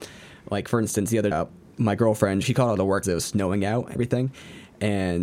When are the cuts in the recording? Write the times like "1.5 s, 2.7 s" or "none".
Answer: 1.3 s, 2.4 s, 3.0 s, 3.9 s